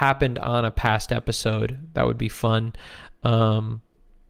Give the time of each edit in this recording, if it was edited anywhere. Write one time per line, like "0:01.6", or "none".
none